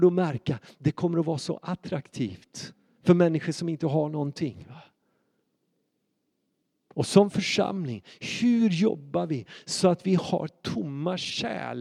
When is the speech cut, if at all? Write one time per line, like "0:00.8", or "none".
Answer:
none